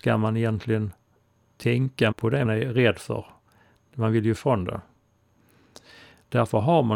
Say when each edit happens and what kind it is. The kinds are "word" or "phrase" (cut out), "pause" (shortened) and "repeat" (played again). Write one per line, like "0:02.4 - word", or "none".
0:02.1 - word
0:02.4 - word
0:04.4 - word

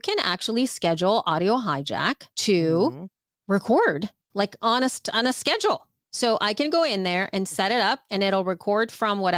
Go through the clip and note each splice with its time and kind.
0:02.3 - pause
0:04.3 - phrase

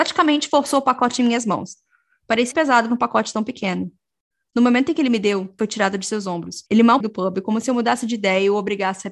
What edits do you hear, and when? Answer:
0:02.5 - word
0:05.6 - phrase
0:06.7 - pause
0:07.0 - phrase

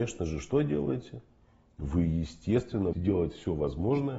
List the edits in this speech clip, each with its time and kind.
0:02.9 - word

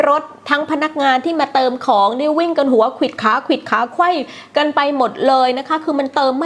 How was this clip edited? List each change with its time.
none

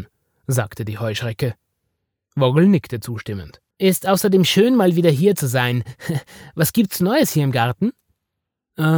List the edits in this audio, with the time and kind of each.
0:03.7 - pause

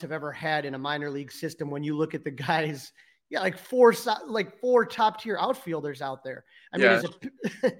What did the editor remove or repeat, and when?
none

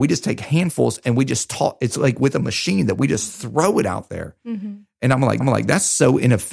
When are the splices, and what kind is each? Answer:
0:05.4 - repeat

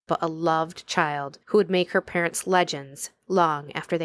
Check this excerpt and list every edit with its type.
0:01.4 - pause

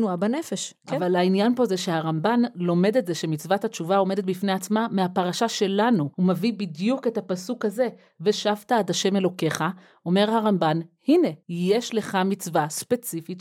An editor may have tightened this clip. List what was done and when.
0:06.1 - pause
0:11.4 - pause

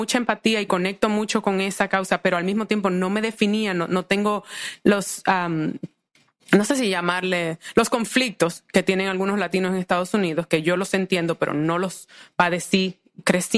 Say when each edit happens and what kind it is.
none

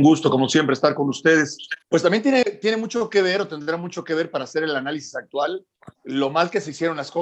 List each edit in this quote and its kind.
0:01.8 - pause
0:05.9 - pause

